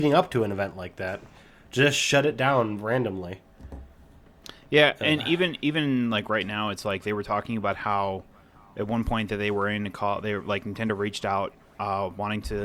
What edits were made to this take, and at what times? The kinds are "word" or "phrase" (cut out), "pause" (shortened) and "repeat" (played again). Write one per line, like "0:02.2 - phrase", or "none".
none